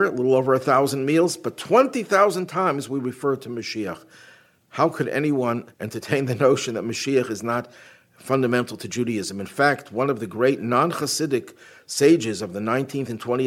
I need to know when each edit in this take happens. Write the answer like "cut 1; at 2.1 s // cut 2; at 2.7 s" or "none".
cut 1; at 5.7 s

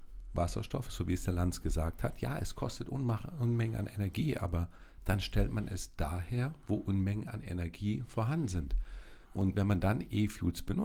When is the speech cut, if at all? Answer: cut 1; at 9.2 s

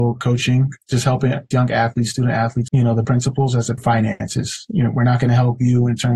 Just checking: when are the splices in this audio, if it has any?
cut 1; at 1.5 s // cut 2; at 2.7 s // cut 3; at 3.0 s // cut 4; at 3.8 s

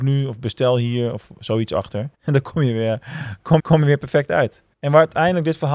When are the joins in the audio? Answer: cut 1; at 2.1 s // cut 2; at 3.6 s // cut 3; at 4.7 s

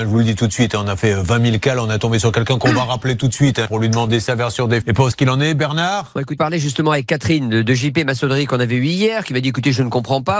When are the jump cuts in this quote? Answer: cut 1; at 3.7 s // cut 2; at 4.8 s // cut 3; at 5.1 s // cut 4; at 6.4 s

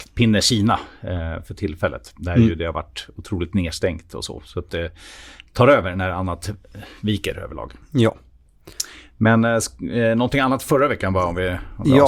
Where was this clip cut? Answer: cut 1; at 4.7 s

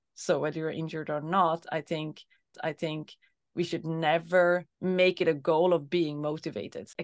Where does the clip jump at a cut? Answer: cut 1; at 2.5 s // cut 2; at 4.7 s

